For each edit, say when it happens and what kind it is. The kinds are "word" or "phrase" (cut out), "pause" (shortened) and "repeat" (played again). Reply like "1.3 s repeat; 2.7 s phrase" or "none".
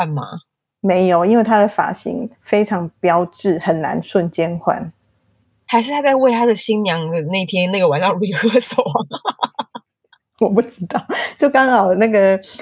2.3 s pause